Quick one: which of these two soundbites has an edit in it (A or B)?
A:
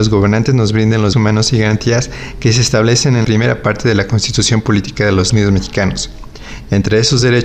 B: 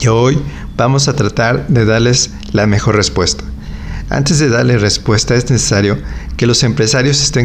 A